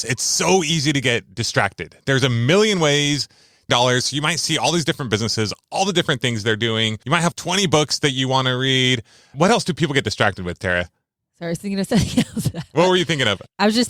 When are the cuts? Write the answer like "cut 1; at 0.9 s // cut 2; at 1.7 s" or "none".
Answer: cut 1; at 3.7 s